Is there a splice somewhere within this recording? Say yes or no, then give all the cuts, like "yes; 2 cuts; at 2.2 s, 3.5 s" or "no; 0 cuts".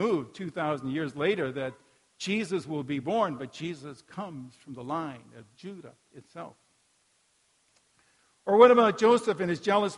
no; 0 cuts